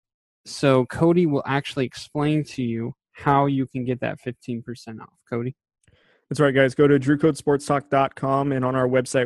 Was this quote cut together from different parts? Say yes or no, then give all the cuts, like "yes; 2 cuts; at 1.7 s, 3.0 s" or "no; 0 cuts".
no; 0 cuts